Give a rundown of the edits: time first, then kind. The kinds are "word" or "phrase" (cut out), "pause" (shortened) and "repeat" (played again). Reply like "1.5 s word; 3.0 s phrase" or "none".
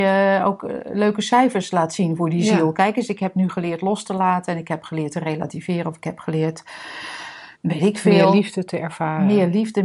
7.5 s pause

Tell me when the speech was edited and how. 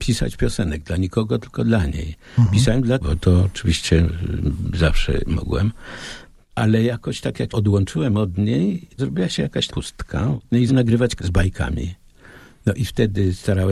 3.0 s word; 7.5 s word; 9.0 s word; 9.7 s word; 10.7 s word; 11.2 s word

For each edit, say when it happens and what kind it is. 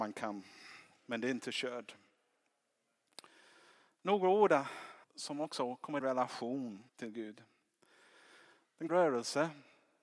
5.0 s pause; 6.0 s word; 6.9 s pause; 8.9 s word

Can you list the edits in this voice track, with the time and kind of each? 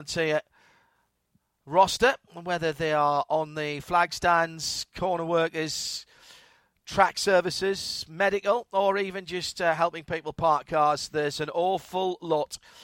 none

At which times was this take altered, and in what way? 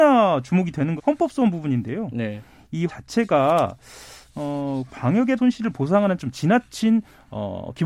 1.0 s word; 2.9 s word; 4.9 s word; 5.4 s word; 6.2 s word

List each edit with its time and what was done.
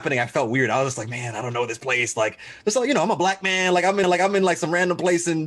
4.0 s repeat

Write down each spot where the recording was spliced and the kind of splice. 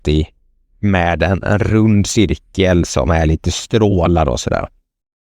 none

